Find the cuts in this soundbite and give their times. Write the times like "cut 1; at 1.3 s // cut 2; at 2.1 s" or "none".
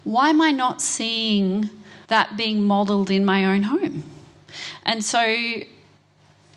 cut 1; at 2.0 s